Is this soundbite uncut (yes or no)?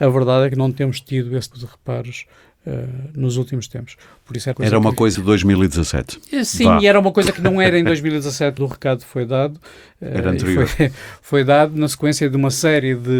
no